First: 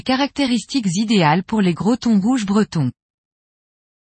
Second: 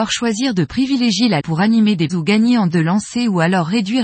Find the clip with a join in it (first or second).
second